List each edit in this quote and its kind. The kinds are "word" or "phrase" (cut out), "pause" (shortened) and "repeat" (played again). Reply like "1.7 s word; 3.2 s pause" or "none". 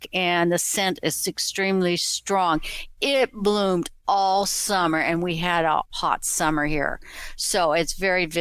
5.8 s word